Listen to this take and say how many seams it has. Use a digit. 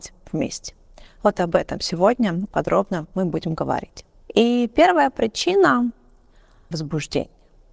3